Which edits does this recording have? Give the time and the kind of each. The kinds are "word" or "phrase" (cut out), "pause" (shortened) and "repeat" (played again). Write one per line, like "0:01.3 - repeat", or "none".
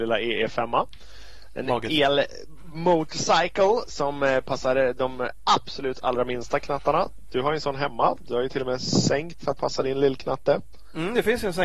0:09.4 - word